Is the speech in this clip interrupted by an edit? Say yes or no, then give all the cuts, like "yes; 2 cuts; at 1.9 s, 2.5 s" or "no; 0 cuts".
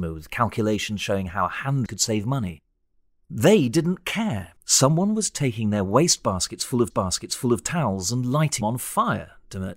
yes; 4 cuts; at 1.9 s, 4.6 s, 6.9 s, 8.6 s